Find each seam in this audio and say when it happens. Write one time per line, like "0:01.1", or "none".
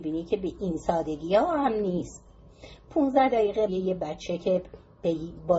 0:03.7